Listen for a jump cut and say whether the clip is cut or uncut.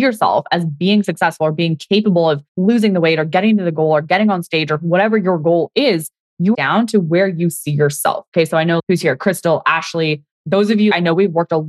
cut